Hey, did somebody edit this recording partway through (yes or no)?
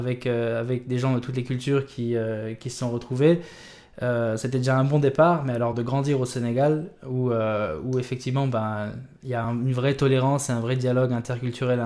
no